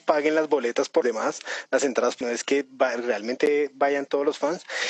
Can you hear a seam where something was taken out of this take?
yes; 2 cuts; at 1.0 s, 2.2 s

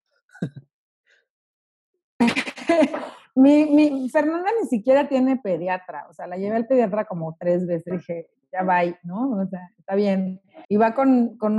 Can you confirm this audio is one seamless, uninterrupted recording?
no; 2 cuts; at 7.9 s, 10.6 s

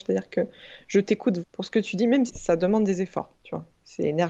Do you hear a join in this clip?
yes; 2 cuts; at 1.4 s, 2.3 s

